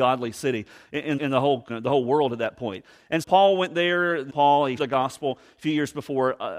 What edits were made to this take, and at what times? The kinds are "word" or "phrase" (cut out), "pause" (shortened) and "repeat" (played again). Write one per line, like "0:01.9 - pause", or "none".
0:01.2 - word
0:01.7 - word
0:03.2 - word
0:04.3 - word
0:04.8 - word